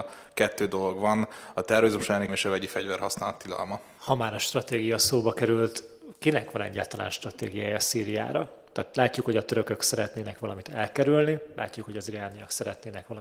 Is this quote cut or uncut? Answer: cut